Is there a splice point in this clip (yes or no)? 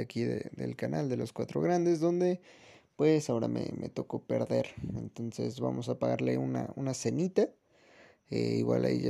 no